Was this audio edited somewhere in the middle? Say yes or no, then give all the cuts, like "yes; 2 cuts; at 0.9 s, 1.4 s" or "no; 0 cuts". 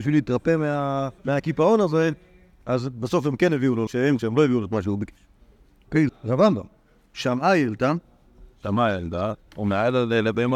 yes; 4 cuts; at 1.2 s, 3.9 s, 4.2 s, 6.1 s